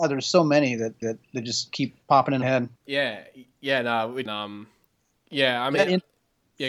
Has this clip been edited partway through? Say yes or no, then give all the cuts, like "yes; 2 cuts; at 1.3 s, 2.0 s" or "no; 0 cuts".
yes; 5 cuts; at 1.0 s, 2.0 s, 2.4 s, 2.8 s, 4.3 s